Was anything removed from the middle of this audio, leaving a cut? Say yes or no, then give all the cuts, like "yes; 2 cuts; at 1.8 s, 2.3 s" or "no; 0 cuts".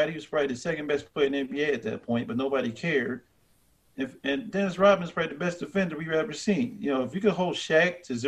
no; 0 cuts